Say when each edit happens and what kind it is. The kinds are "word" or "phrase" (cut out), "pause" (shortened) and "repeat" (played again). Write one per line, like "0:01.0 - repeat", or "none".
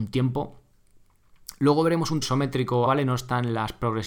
0:02.2 - word
0:02.9 - word